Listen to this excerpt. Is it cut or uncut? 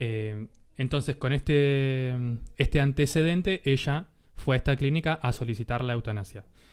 uncut